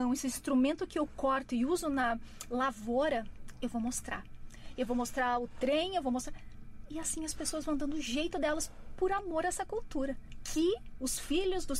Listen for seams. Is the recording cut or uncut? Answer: uncut